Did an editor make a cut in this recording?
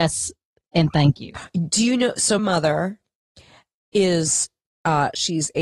yes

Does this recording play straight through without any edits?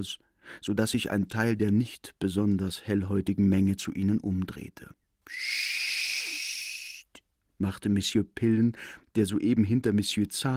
yes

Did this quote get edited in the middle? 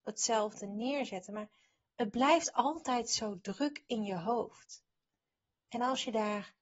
no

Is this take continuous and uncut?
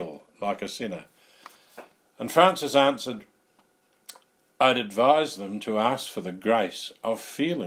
yes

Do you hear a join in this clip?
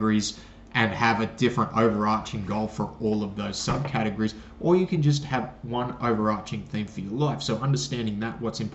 no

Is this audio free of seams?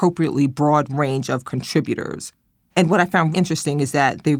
no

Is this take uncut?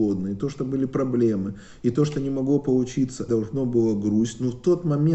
no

